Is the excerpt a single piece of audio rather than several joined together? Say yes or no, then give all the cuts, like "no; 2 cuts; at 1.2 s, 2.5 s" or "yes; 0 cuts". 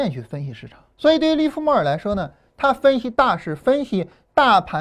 no; 1 cut; at 0.9 s